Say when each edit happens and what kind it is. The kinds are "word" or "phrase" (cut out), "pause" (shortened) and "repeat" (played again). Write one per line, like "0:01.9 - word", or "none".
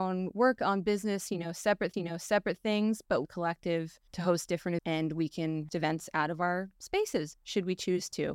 0:01.9 - repeat
0:03.2 - phrase
0:04.1 - pause
0:04.8 - word
0:05.7 - word